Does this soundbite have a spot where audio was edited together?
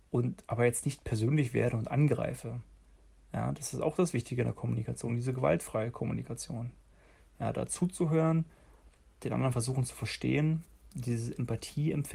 no; 0 cuts

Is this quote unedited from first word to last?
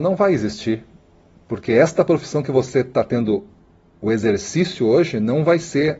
yes; 0 cuts

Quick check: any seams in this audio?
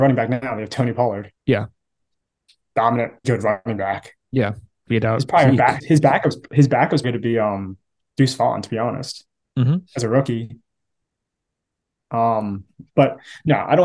yes; 6 cuts; at 1.4 s, 3.2 s, 4.9 s, 5.8 s, 7.0 s, 9.9 s

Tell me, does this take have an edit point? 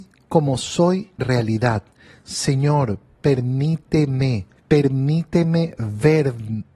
yes; 2 cuts; at 1.2 s, 4.6 s

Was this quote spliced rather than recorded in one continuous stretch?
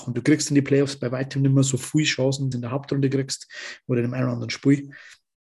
yes; 1 cut; at 2.5 s

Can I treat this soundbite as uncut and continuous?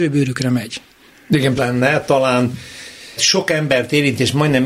no; 2 cuts; at 1.6 s, 3.2 s

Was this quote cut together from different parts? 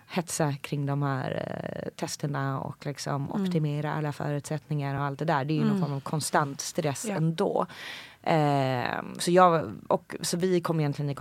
no; 0 cuts

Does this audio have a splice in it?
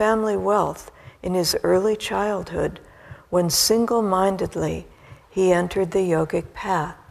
no; 0 cuts

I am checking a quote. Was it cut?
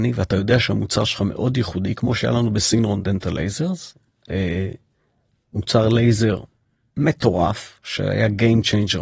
no; 0 cuts

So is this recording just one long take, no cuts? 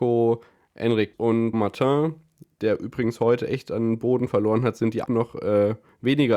no; 3 cuts; at 1.1 s, 1.5 s, 5.1 s

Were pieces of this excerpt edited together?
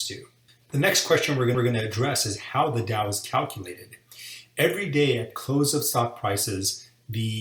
yes; 2 cuts; at 1.5 s, 5.3 s

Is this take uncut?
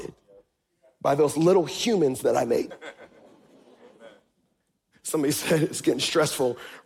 yes; 0 cuts

